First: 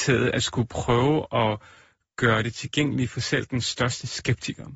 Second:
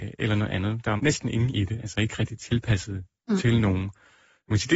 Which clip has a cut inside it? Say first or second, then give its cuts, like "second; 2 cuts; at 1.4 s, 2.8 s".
second; 2 cuts; at 1.0 s, 1.5 s